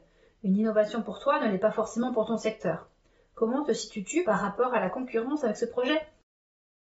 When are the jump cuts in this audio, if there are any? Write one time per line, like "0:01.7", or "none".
none